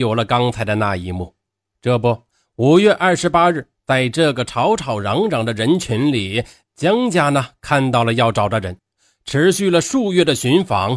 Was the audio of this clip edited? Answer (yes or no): no